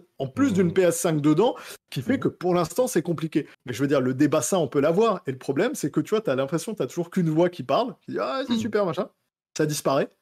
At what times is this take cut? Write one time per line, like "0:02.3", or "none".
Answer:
0:03.5